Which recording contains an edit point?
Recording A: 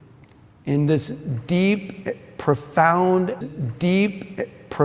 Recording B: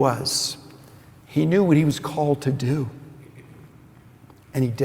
A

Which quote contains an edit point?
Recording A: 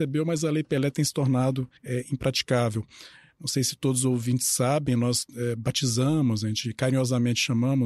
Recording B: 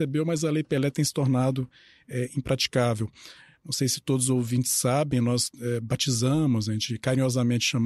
A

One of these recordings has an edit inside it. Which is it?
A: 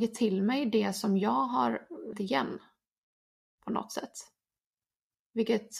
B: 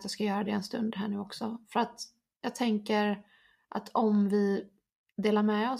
A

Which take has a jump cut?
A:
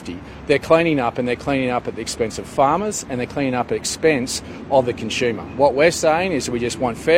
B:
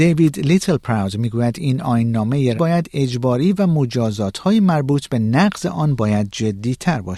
B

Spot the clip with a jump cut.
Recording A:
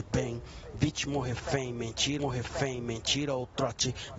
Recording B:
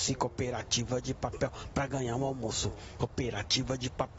A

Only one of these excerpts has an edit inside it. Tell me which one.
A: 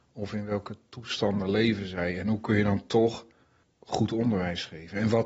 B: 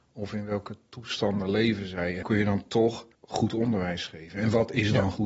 B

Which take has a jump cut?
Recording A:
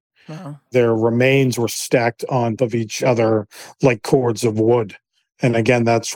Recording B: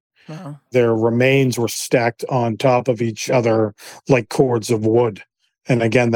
A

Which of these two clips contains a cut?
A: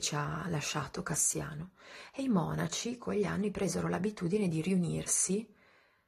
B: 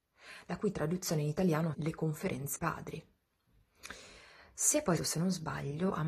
B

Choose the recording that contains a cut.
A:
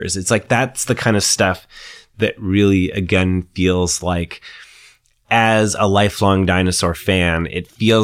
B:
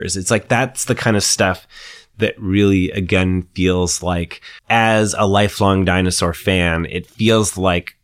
B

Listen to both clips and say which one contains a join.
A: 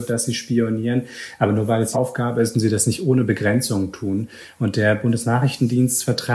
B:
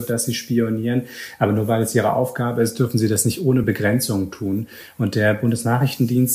A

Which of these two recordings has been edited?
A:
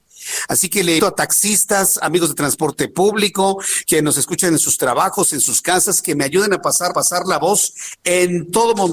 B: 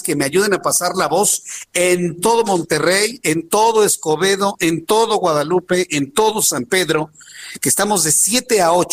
A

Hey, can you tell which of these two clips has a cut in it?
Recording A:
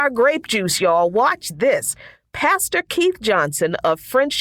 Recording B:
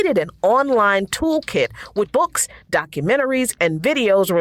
B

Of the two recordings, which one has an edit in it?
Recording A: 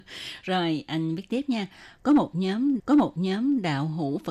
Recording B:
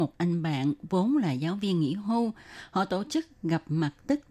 A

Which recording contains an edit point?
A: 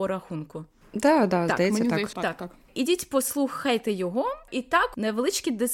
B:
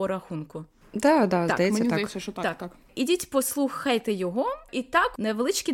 A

